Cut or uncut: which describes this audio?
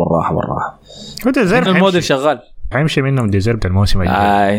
cut